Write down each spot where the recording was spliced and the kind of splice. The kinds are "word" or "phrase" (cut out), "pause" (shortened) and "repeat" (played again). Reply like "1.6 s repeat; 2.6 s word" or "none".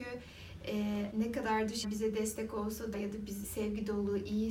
1.1 s word; 1.8 s word; 2.9 s word; 3.4 s word